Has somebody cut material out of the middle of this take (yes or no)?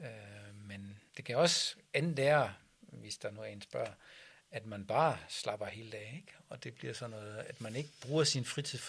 yes